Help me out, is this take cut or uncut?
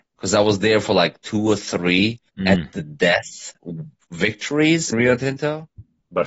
cut